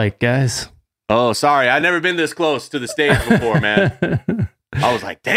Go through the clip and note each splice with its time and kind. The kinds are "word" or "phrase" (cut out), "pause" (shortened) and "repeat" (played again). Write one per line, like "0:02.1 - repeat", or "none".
none